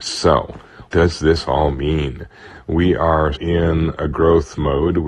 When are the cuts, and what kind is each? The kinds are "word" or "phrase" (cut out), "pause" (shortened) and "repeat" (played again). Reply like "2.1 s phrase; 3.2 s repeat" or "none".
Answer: 0.9 s word; 3.4 s word